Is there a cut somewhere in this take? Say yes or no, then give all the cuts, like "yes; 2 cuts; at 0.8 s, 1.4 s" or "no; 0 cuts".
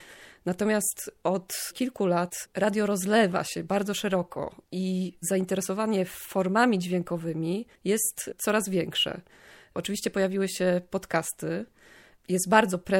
yes; 2 cuts; at 4.6 s, 7.8 s